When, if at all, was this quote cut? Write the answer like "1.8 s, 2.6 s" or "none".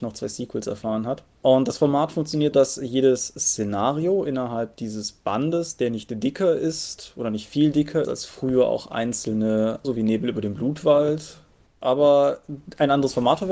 2.5 s, 8.0 s, 9.8 s